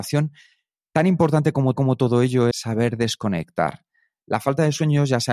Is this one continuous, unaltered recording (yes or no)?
no